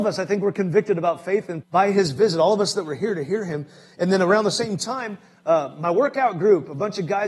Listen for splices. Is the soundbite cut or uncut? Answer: cut